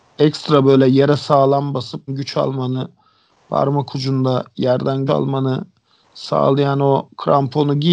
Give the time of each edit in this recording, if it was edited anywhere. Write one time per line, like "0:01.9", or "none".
0:02.1
0:05.1